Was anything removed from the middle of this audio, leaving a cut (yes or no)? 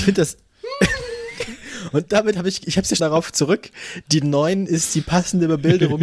yes